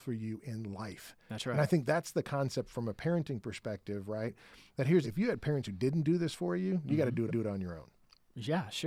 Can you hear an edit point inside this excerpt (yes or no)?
yes